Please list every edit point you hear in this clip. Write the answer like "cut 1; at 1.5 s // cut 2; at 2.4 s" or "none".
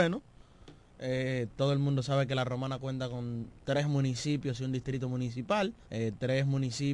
cut 1; at 3.6 s // cut 2; at 5.8 s